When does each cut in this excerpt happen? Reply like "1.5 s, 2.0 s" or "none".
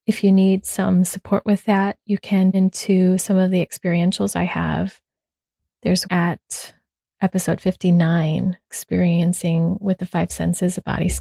2.5 s, 6.0 s, 8.6 s